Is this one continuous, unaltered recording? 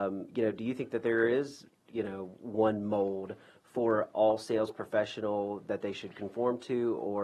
yes; 0 cuts

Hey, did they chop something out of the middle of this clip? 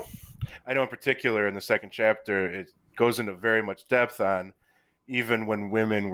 no; 0 cuts

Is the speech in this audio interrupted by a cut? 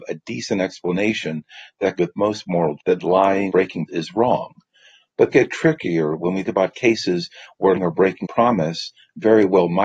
yes; 8 cuts; at 2.0 s, 2.8 s, 3.5 s, 3.9 s, 5.3 s, 6.4 s, 7.7 s, 8.2 s

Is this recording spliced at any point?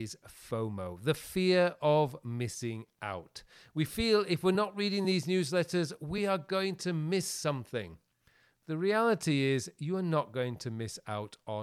no; 0 cuts

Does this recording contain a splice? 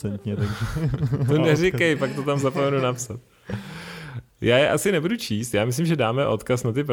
no; 0 cuts

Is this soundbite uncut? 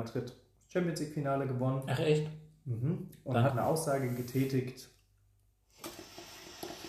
no; 1 cut; at 3.5 s

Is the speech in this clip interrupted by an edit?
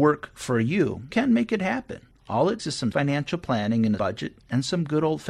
yes; 4 cuts; at 1.1 s, 2.6 s, 2.9 s, 4.0 s

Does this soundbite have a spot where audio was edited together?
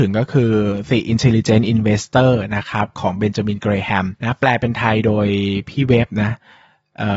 no; 0 cuts

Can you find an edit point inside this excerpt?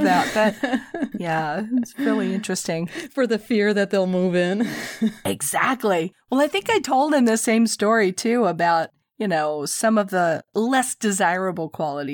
no; 0 cuts

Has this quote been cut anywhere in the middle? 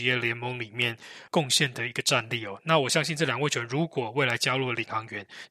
yes; 1 cut; at 1.3 s

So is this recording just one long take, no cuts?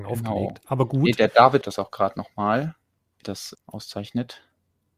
no; 3 cuts; at 1.6 s, 3.2 s, 3.5 s

